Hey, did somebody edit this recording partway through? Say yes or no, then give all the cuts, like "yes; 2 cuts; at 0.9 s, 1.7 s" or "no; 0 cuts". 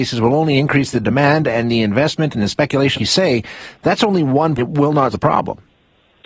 yes; 3 cuts; at 3.0 s, 4.6 s, 5.1 s